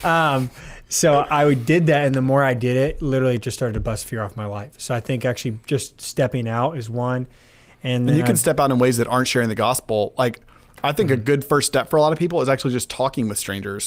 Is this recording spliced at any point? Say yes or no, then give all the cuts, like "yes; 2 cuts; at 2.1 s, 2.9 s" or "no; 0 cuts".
no; 0 cuts